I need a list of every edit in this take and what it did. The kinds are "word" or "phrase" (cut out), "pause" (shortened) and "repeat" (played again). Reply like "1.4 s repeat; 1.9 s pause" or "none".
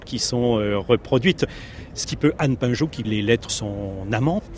2.0 s word; 3.0 s word; 3.5 s word